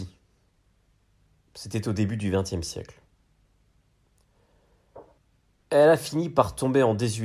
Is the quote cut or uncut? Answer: cut